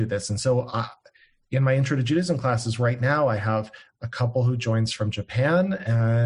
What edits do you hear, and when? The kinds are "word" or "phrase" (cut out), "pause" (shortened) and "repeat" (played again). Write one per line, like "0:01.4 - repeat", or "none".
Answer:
none